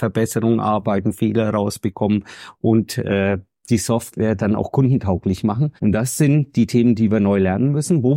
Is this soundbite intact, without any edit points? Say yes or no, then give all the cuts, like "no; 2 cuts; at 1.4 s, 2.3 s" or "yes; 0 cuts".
no; 1 cut; at 5.8 s